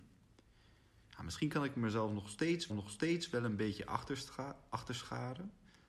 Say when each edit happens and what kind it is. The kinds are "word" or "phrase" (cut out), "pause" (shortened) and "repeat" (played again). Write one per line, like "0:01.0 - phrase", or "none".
0:02.7 - repeat